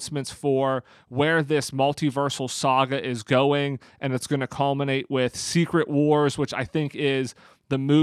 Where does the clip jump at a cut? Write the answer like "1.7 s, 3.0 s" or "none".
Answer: none